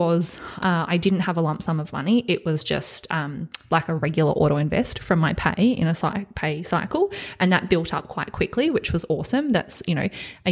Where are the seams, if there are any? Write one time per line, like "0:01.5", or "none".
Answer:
none